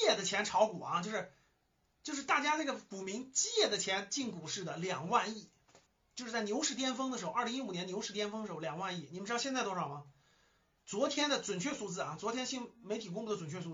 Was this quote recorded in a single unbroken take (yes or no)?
no